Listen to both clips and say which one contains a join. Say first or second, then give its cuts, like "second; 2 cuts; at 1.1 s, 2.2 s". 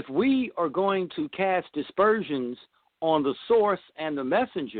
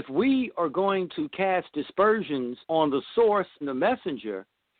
second; 2 cuts; at 2.6 s, 3.6 s